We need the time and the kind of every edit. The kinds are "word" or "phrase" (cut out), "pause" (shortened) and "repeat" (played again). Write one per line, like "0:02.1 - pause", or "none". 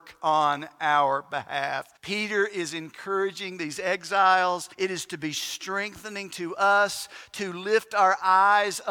0:02.0 - pause
0:04.7 - pause